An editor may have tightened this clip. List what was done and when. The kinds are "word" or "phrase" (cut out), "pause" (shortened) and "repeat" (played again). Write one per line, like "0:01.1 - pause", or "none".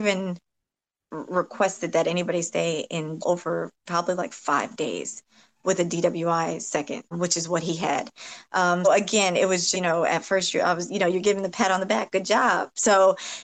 0:03.2 - word
0:07.1 - word
0:08.8 - word
0:09.7 - word